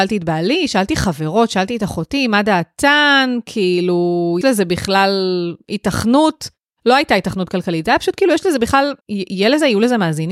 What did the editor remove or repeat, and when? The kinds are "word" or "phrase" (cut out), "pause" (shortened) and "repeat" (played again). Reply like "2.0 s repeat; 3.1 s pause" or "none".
4.4 s word; 9.0 s pause